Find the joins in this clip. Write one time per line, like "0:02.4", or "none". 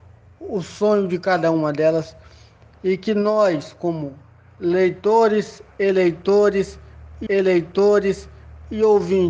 0:07.3